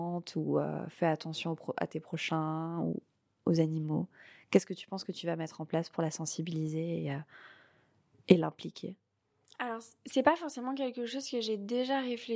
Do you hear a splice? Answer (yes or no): no